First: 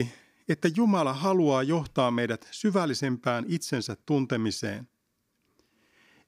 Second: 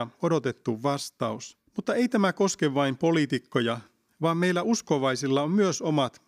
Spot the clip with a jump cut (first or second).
second